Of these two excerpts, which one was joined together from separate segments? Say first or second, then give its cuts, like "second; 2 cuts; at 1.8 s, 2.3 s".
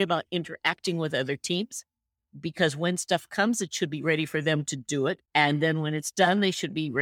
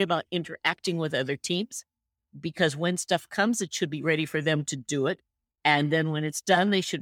first; 1 cut; at 5.2 s